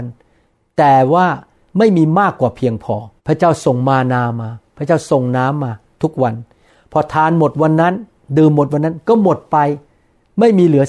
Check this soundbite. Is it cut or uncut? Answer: cut